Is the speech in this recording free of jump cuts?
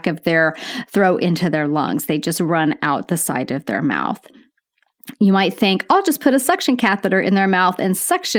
yes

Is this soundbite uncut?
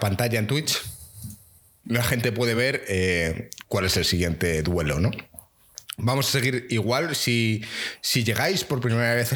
yes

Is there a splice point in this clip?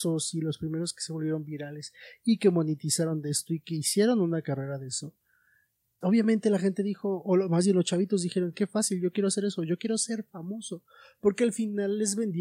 yes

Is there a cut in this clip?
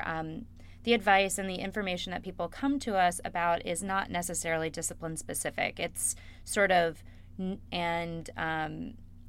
yes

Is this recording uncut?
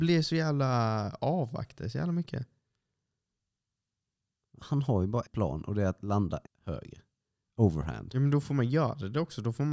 no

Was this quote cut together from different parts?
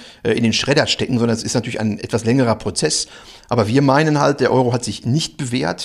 no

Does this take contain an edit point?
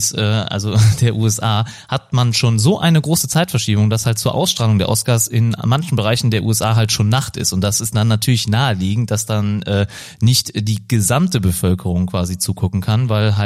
no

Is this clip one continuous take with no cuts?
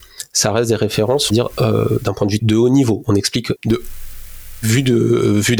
no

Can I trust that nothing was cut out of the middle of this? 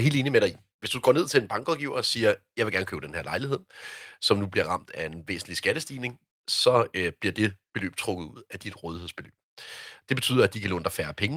yes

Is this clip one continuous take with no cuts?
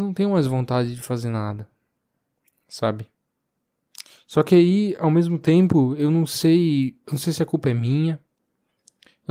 yes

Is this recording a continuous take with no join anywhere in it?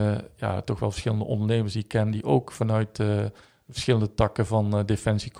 yes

